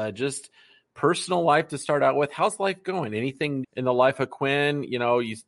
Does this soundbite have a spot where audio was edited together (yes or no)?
yes